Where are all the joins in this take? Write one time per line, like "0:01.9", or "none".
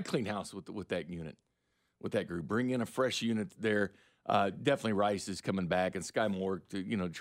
none